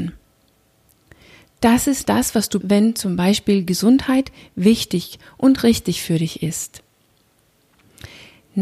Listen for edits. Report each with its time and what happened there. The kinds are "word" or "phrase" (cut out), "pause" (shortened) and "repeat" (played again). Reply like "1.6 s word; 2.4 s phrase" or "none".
2.0 s word; 2.6 s word